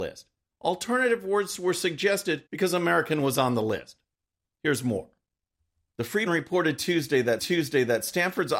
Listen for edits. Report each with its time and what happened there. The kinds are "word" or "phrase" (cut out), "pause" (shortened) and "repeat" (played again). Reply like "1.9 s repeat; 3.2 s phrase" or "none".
2.5 s pause; 6.3 s word; 7.4 s repeat